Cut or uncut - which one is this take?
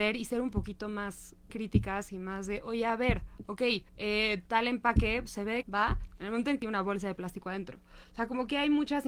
cut